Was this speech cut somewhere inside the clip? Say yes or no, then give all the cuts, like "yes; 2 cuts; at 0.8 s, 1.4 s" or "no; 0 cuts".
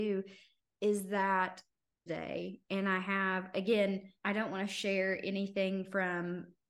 yes; 2 cuts; at 2.1 s, 4.2 s